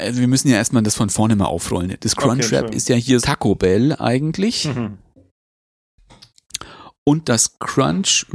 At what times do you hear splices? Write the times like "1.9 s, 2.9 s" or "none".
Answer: 3.2 s